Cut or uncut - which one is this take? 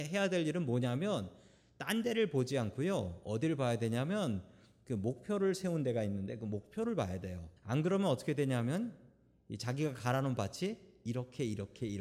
cut